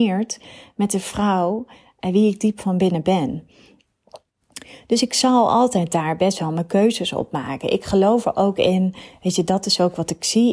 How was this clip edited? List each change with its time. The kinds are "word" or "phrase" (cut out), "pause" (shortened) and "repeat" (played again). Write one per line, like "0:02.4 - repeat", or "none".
none

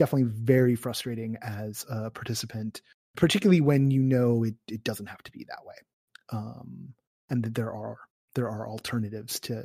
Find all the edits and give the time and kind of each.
0:03.1 - word

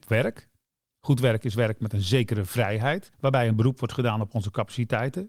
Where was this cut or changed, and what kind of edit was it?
0:03.1 - pause

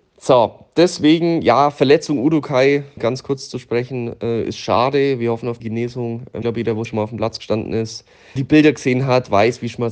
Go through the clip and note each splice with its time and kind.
0:03.0 - word
0:05.6 - word
0:06.4 - word
0:06.8 - word
0:08.4 - word

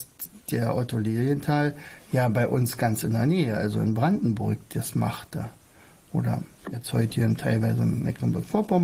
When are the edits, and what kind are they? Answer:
none

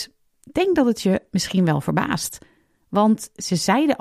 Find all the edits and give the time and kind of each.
none

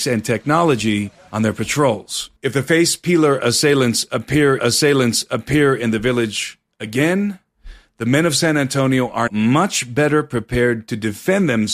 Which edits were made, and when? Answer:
0:02.4 - pause
0:04.6 - repeat
0:09.3 - word

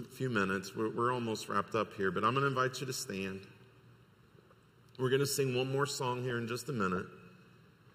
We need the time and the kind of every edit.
none

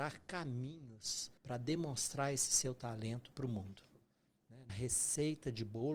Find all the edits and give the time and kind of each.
0:01.4 - pause
0:04.7 - phrase

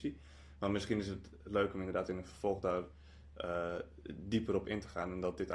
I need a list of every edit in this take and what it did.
none

